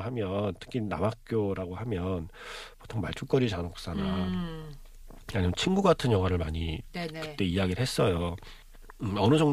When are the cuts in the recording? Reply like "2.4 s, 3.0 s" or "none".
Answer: none